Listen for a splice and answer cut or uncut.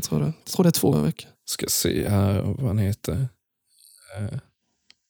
cut